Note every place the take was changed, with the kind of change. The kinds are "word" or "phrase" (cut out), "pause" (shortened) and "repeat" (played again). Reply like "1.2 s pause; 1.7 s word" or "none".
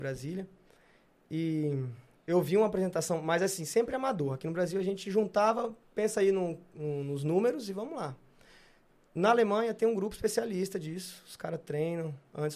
2.2 s pause